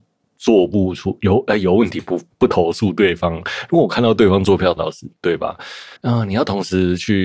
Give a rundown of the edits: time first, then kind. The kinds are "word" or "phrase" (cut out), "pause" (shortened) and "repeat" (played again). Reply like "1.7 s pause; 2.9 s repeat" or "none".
4.8 s phrase; 6.0 s pause